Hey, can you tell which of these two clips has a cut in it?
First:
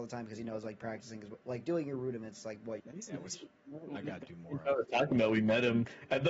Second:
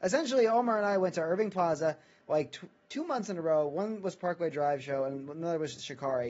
first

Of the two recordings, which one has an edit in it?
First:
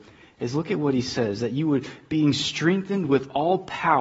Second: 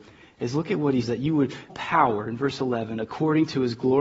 second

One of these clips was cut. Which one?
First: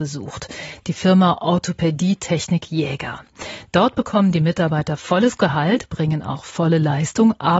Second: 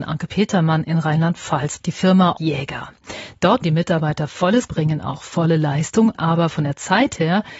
second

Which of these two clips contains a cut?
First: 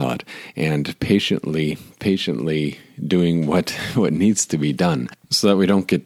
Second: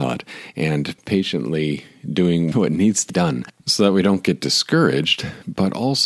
second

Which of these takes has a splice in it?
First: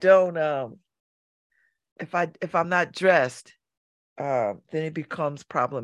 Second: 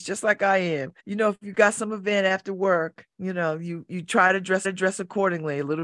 second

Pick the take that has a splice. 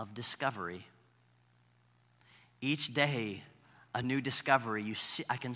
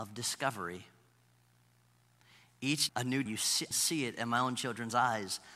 second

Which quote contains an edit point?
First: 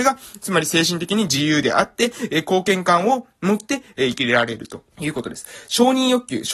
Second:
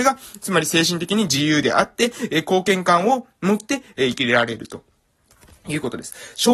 first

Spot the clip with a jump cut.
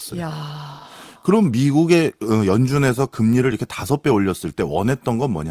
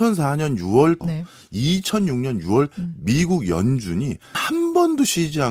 second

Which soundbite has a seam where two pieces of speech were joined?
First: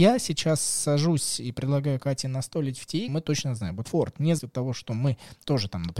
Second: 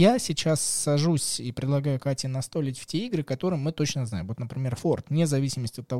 first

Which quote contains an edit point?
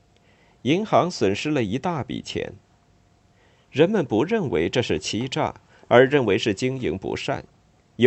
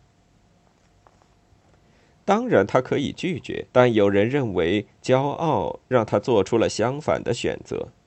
second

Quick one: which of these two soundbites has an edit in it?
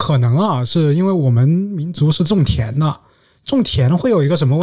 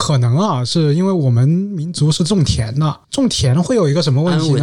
second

